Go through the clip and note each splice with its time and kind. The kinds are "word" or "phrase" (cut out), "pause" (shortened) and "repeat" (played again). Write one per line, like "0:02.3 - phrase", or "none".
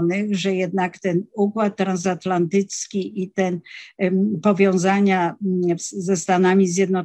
none